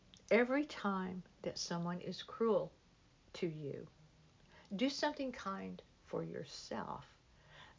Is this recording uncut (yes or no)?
yes